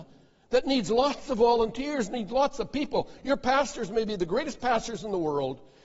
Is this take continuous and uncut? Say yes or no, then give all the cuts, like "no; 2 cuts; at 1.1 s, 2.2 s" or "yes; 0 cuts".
yes; 0 cuts